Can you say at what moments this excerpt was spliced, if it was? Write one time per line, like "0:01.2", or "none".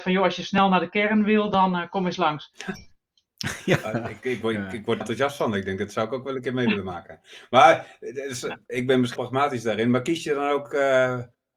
0:05.0
0:09.2